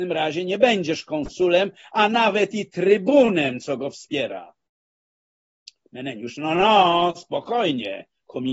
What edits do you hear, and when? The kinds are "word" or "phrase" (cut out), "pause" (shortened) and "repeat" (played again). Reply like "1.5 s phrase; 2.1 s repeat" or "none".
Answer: none